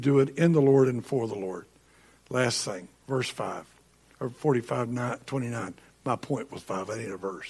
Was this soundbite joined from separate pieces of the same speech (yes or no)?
no